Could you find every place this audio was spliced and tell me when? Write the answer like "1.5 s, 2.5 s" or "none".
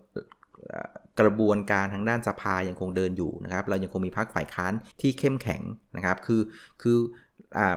4.9 s